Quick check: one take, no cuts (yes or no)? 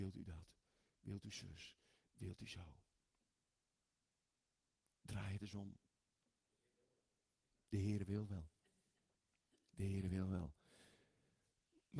yes